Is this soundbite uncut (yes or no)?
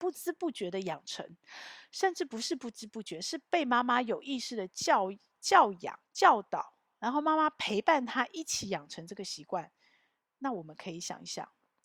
no